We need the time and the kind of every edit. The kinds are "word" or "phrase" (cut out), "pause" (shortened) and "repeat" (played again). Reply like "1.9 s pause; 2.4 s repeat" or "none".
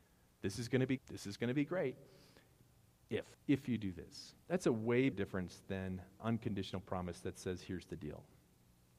1.0 s word; 3.3 s pause; 4.4 s pause; 5.1 s word; 6.2 s word